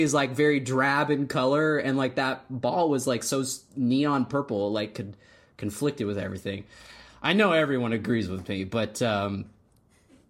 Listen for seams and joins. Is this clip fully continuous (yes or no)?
yes